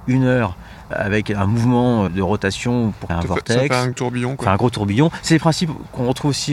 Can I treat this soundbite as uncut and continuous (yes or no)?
no